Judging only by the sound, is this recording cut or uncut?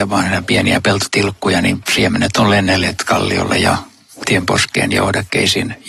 uncut